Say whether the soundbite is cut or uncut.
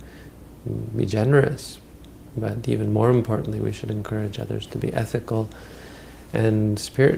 uncut